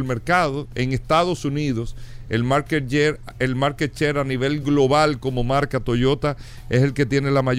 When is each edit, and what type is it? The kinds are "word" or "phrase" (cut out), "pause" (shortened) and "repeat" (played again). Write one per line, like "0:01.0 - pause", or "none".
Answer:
none